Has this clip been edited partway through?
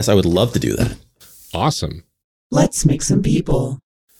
no; 0 cuts

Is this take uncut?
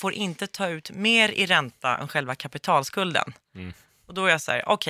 yes; 0 cuts

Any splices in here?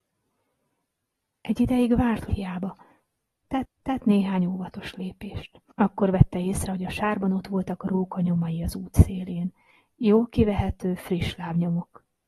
yes; 3 cuts; at 2.3 s, 3.6 s, 5.7 s

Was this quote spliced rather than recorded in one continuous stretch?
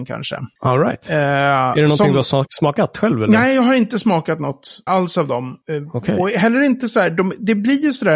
yes; 1 cut; at 4.9 s

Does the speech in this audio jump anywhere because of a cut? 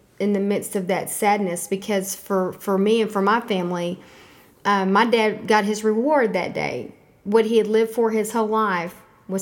no; 0 cuts

